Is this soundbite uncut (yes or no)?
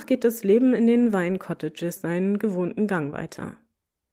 no